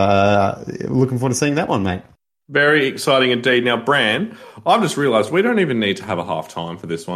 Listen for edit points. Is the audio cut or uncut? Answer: uncut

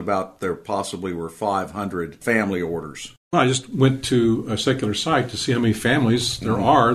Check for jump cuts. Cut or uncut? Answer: cut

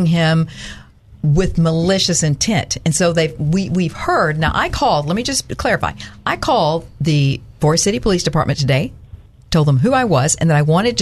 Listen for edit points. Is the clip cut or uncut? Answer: uncut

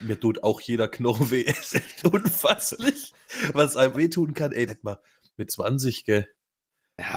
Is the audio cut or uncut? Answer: cut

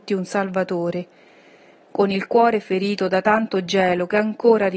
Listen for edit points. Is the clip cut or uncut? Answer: uncut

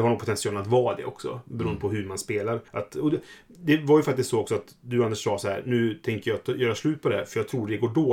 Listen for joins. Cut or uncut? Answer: cut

